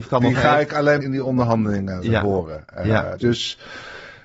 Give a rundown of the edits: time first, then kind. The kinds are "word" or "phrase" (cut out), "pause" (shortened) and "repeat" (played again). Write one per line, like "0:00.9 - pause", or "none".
0:01.0 - word
0:02.0 - word
0:03.2 - word